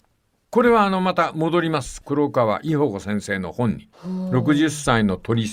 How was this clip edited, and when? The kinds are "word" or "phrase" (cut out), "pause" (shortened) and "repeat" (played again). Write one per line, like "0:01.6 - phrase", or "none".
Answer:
0:03.9 - pause